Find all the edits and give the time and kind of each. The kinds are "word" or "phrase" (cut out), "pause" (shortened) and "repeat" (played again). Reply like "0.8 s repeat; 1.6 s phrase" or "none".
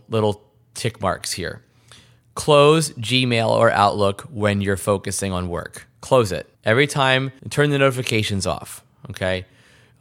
6.5 s pause; 7.4 s pause